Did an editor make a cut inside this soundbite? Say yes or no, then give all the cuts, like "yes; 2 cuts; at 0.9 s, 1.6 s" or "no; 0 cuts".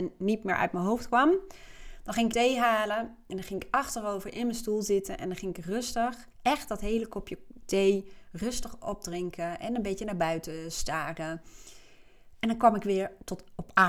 yes; 2 cuts; at 2.3 s, 6.3 s